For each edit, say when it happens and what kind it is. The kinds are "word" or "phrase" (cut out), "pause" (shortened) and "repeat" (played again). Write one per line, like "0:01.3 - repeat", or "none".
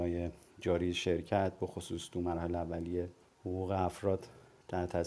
0:03.2 - pause

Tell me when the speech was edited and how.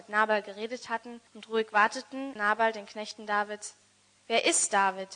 0:01.3 - pause
0:02.4 - word

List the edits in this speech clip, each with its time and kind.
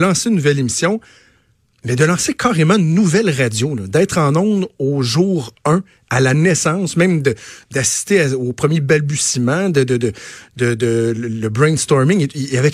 none

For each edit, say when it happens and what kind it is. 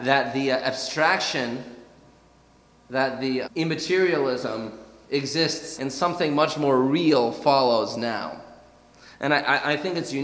0:03.4 - word
0:05.8 - word

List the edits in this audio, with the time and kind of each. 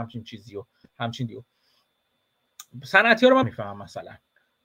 0:01.3 - word
0:03.4 - word

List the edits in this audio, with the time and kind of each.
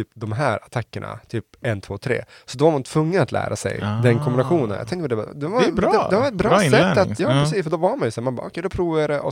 0:07.2 - word

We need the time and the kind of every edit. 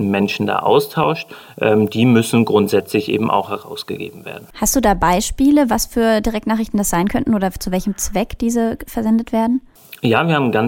0:04.5 - pause

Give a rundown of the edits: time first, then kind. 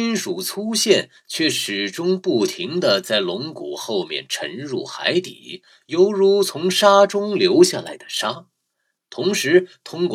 none

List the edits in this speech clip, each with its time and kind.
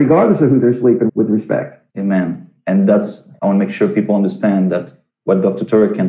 0:01.1 - word
0:01.9 - pause
0:03.4 - phrase

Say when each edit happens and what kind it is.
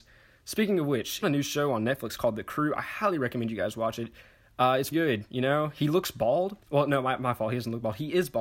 0:01.2 - phrase
0:04.9 - word
0:06.6 - pause

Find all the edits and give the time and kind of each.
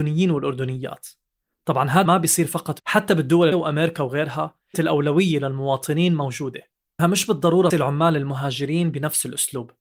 0:02.1 - word
0:02.8 - word
0:03.5 - word
0:04.7 - word
0:07.0 - word
0:07.7 - word

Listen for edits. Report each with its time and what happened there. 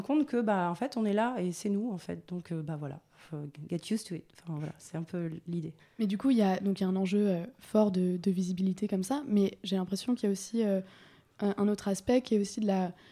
0:05.8 - pause

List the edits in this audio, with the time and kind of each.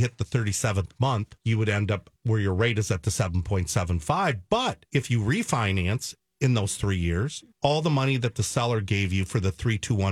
0:01.4 - pause
0:02.2 - pause
0:04.9 - pause
0:07.5 - pause

